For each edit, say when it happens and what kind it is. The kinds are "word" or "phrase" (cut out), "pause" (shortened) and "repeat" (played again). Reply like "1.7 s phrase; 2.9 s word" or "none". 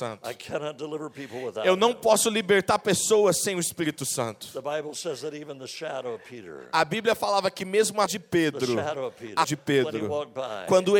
8.1 s word; 9.4 s word